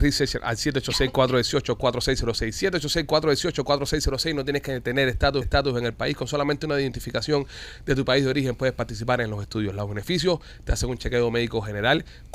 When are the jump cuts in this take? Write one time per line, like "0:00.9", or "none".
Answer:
0:05.4